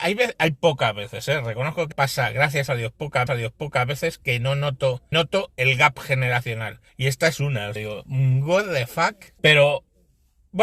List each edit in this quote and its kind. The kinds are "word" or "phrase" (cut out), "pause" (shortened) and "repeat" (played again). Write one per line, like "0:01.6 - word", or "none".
0:01.9 - word
0:03.3 - repeat
0:05.1 - word
0:06.9 - pause
0:07.8 - word
0:09.4 - pause